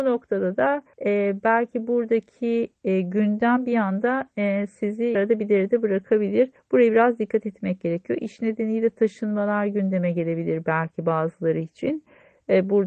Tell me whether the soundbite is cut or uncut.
cut